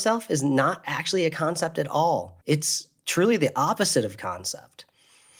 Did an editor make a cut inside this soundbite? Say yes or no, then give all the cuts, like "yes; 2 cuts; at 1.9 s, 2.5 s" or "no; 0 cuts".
yes; 1 cut; at 2.4 s